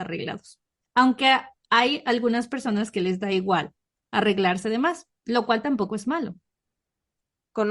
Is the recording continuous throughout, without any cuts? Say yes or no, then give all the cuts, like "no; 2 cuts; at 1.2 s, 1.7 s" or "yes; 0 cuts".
yes; 0 cuts